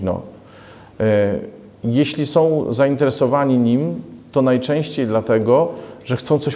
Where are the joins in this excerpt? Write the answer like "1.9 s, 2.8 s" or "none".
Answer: none